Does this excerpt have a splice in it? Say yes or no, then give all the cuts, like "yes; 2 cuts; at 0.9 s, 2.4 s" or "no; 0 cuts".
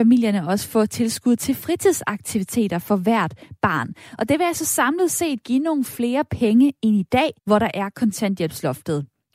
yes; 1 cut; at 7.4 s